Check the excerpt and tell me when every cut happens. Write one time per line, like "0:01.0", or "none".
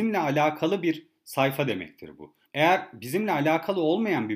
0:02.4